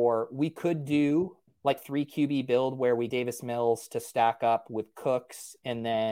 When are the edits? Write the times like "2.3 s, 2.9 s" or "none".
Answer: 1.5 s, 1.8 s, 3.1 s